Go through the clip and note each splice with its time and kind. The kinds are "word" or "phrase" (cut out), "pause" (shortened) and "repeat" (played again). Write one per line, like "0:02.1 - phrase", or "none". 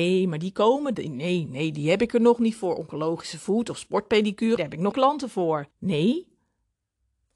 0:00.9 - word
0:04.6 - word
0:04.9 - word
0:05.7 - pause